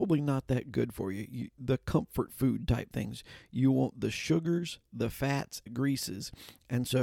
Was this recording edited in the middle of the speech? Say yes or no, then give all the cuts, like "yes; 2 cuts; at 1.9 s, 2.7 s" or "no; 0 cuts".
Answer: yes; 1 cut; at 5.7 s